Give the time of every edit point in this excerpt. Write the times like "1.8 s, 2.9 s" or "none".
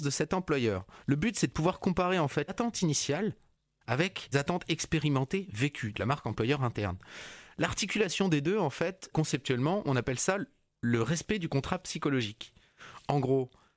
2.5 s, 4.3 s, 5.9 s, 9.1 s